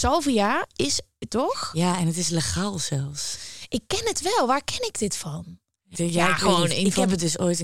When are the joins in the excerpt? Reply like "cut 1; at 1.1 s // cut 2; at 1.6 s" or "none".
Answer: cut 1; at 1.3 s // cut 2; at 5.9 s